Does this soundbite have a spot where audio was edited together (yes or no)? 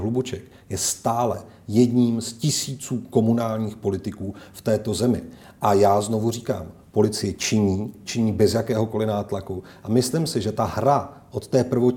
no